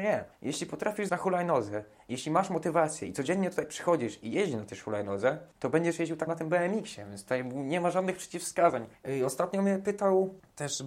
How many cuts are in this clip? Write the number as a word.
two